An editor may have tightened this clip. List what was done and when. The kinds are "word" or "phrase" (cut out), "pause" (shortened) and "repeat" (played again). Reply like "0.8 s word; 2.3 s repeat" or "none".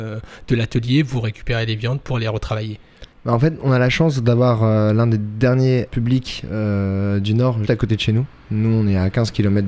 3.1 s pause; 5.9 s word; 7.6 s word